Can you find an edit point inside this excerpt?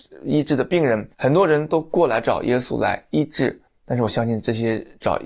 yes; 2 cuts; at 1.1 s, 3.7 s

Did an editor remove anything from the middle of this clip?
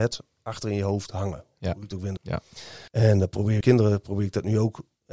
yes; 3 cuts; at 2.2 s, 2.9 s, 3.6 s

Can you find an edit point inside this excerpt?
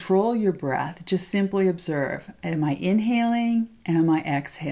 no; 0 cuts

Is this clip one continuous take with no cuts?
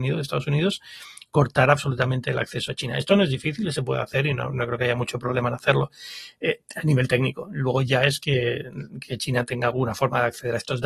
yes; 0 cuts

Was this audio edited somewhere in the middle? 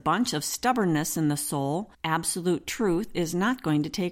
yes; 1 cut; at 1.9 s

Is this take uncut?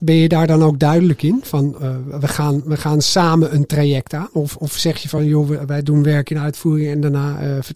yes; 0 cuts

